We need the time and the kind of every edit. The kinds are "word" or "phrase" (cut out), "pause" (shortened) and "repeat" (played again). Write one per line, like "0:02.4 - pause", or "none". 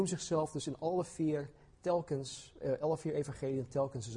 none